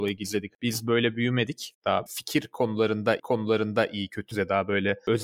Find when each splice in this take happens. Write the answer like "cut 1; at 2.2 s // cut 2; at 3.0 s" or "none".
cut 1; at 2.1 s // cut 2; at 3.2 s // cut 3; at 4.3 s